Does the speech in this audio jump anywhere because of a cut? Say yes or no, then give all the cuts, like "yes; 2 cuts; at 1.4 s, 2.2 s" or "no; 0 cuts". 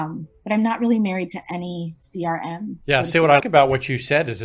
yes; 2 cuts; at 2.8 s, 3.4 s